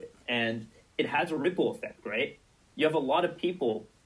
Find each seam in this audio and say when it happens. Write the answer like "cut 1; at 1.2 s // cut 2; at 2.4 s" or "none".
none